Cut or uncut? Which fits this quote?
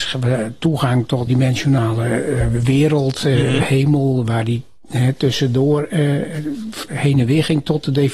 cut